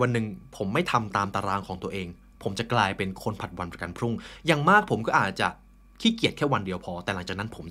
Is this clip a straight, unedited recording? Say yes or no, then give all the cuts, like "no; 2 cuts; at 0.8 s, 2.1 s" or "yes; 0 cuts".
yes; 0 cuts